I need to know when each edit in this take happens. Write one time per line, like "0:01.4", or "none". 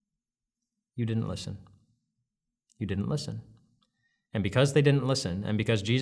none